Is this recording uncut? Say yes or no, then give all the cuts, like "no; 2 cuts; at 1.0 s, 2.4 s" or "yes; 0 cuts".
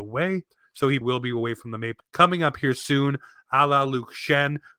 no; 2 cuts; at 1.0 s, 2.0 s